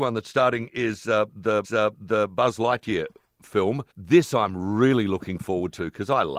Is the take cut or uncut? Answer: cut